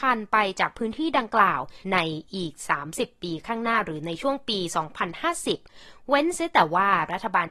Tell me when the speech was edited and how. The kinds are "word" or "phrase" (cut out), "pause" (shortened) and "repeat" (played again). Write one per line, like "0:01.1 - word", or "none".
0:01.8 - pause